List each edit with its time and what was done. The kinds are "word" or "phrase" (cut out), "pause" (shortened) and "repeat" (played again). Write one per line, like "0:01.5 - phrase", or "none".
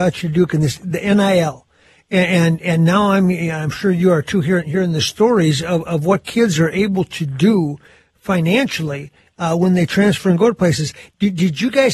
none